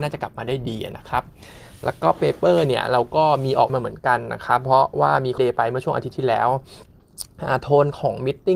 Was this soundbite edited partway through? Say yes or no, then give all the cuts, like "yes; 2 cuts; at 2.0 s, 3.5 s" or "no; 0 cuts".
yes; 2 cuts; at 3.7 s, 5.4 s